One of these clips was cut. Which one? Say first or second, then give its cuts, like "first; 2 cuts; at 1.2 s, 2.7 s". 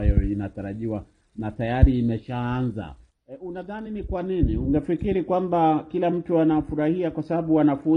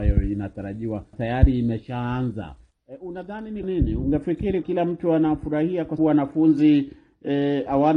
second; 4 cuts; at 1.1 s, 3.6 s, 4.6 s, 6.0 s